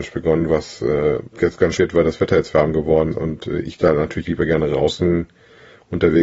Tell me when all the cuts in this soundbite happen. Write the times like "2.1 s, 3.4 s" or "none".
1.3 s, 1.8 s, 3.1 s, 4.2 s